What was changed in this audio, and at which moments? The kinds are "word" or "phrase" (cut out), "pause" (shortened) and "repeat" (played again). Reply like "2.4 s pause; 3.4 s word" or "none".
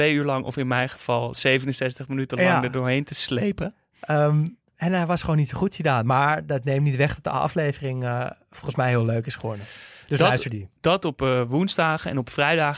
10.8 s pause